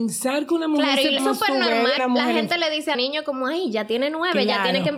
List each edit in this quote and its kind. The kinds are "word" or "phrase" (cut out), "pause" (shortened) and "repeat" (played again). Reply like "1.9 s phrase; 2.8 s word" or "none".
1.2 s word; 2.0 s word; 2.9 s word

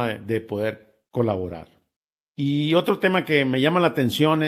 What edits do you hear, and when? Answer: 2.1 s pause

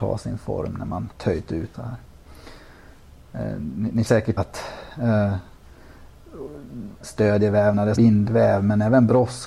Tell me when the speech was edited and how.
1.1 s word; 1.7 s word; 4.1 s word; 4.4 s word; 7.0 s word; 7.9 s word

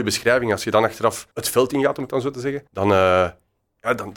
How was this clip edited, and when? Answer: 1.3 s pause; 2.7 s pause

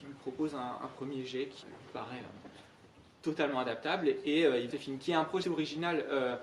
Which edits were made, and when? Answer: 1.6 s word; 4.7 s phrase; 5.4 s word

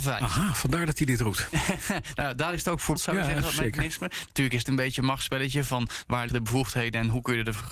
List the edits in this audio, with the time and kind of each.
3.0 s word; 4.6 s word; 6.3 s word

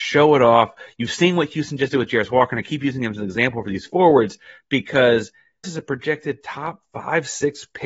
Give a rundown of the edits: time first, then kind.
5.6 s word

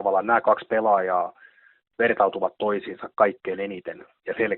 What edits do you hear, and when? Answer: none

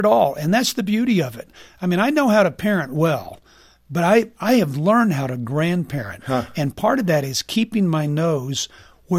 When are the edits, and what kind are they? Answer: none

